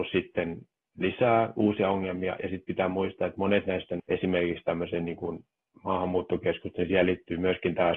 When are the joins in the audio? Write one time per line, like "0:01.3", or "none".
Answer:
none